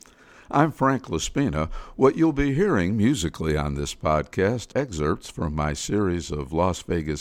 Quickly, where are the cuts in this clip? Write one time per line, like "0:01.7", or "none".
0:04.7

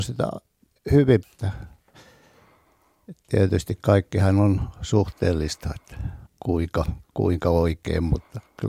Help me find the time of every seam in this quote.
0:01.2
0:06.3

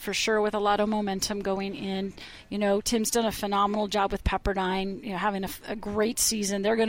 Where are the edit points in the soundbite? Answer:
none

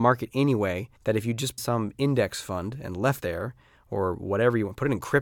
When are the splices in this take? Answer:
0:01.0
0:01.6
0:03.2

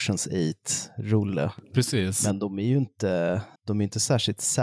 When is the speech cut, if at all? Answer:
0:03.6

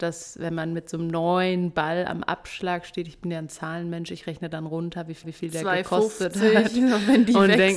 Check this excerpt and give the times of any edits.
0:05.2

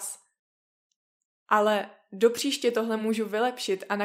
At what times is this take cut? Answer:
none

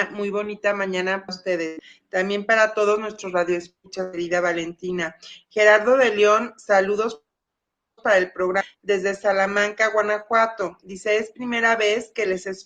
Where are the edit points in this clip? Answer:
0:01.3

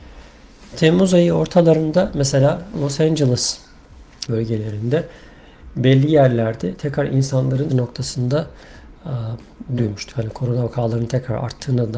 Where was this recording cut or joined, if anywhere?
0:04.3
0:07.7
0:09.8

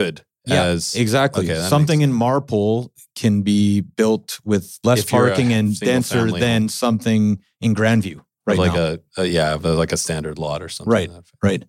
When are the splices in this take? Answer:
none

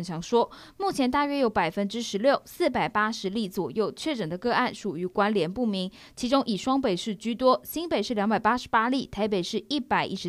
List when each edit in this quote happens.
none

